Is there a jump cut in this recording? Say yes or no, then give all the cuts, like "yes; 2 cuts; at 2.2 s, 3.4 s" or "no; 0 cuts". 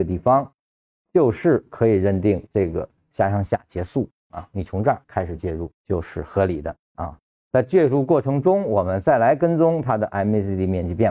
yes; 4 cuts; at 2.5 s, 5.0 s, 5.7 s, 6.8 s